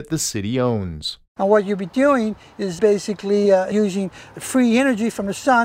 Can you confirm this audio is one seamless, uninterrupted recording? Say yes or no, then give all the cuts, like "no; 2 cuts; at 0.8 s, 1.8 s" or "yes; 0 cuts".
yes; 0 cuts